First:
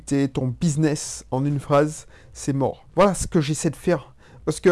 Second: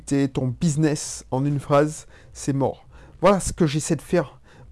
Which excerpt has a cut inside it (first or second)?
first